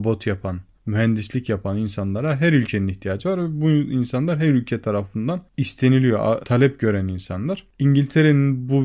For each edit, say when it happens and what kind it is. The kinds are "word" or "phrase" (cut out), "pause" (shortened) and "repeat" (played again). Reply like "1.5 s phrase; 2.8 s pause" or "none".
none